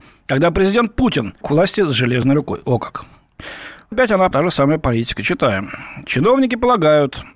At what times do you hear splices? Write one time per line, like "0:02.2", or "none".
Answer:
0:01.4
0:03.9
0:04.3

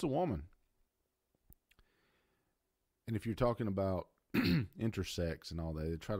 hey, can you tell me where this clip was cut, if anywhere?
none

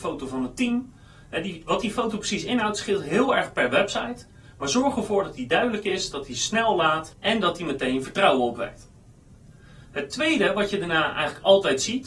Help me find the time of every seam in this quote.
none

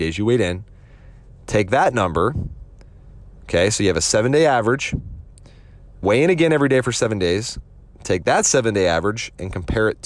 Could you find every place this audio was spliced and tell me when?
0:06.0

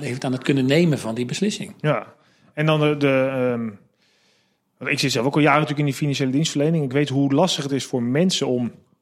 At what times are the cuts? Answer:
none

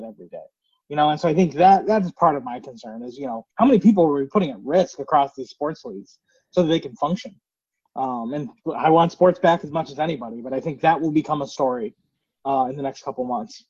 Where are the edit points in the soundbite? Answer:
0:03.5

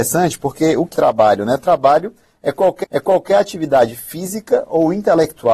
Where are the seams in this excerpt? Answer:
0:00.9
0:02.8

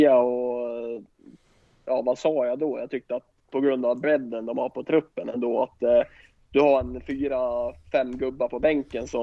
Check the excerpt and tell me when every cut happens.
none

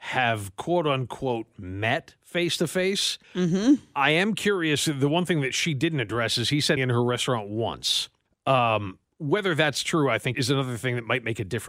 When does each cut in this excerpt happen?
0:03.2
0:06.8
0:08.3
0:10.3

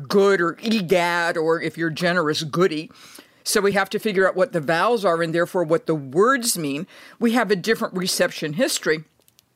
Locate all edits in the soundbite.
none

